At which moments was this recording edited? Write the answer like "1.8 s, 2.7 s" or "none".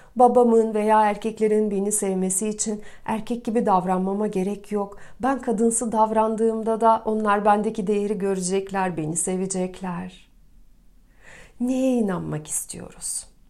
none

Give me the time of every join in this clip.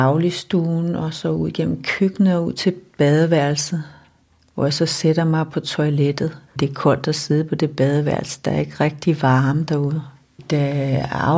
6.5 s

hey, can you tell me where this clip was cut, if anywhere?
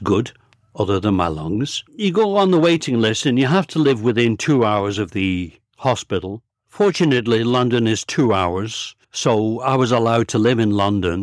1.9 s, 6.5 s, 9.0 s

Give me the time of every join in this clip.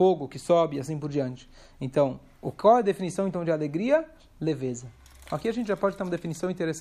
none

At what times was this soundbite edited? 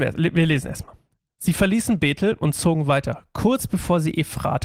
none

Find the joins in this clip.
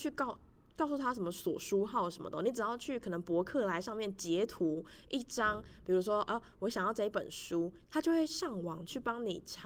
none

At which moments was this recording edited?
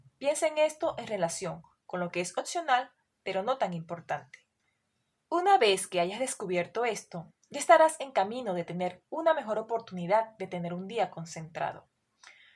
none

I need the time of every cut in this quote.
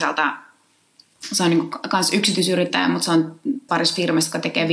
3.7 s

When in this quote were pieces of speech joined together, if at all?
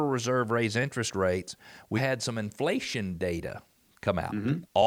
2.0 s

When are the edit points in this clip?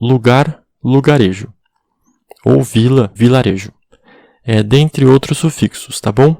3.2 s

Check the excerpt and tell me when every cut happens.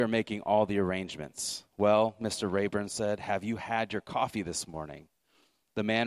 none

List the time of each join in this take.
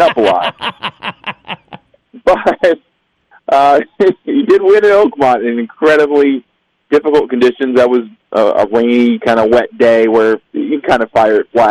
none

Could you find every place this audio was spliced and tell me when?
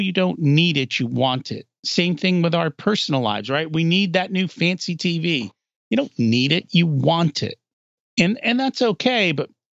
none

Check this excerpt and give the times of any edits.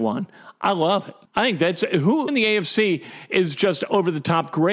1.2 s, 2.3 s

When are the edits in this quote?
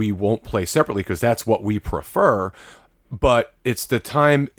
none

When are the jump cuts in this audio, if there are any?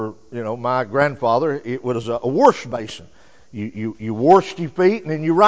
none

